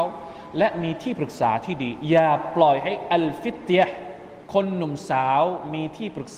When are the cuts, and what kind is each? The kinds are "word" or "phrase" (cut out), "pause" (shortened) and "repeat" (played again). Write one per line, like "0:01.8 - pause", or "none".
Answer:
0:04.4 - pause